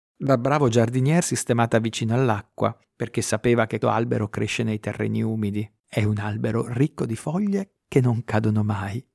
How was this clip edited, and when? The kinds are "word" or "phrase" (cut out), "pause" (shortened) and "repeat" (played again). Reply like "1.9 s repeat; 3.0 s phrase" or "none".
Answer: 1.2 s word; 2.8 s pause; 3.8 s word; 5.8 s pause